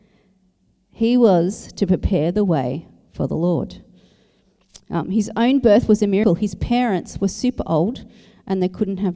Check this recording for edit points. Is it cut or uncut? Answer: uncut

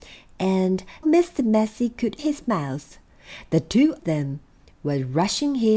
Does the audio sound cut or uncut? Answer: cut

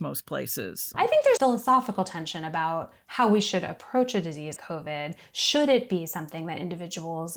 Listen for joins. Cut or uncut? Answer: cut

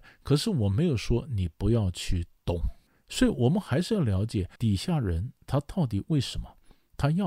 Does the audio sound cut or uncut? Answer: cut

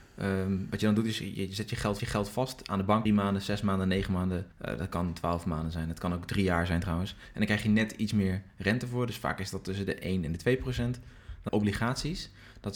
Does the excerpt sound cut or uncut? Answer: cut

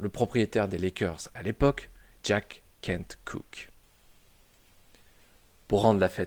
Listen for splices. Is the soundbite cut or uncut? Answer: uncut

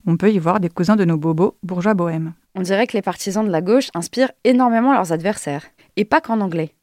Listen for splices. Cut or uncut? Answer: cut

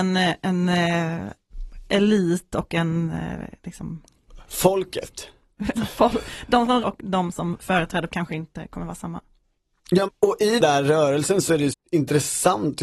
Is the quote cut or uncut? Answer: cut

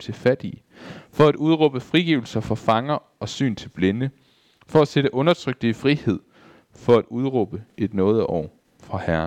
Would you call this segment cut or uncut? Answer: uncut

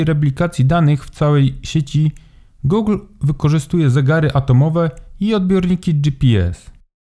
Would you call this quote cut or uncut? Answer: uncut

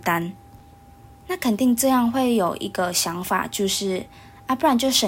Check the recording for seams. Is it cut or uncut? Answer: uncut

